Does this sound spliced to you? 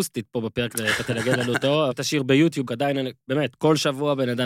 yes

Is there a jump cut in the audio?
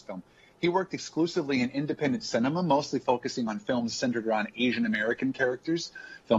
no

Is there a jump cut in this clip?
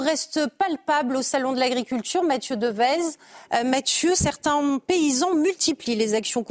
no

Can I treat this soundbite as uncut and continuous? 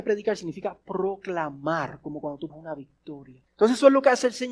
no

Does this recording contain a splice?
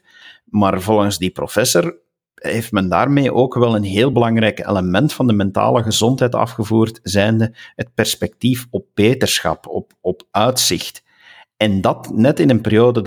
no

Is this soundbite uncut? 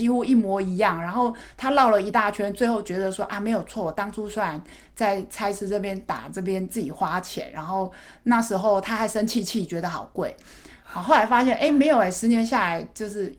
yes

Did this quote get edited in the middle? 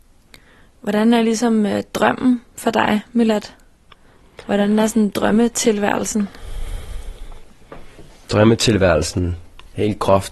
no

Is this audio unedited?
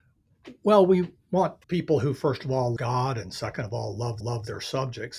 no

